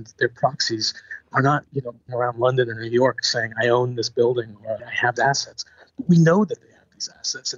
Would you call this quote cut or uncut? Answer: cut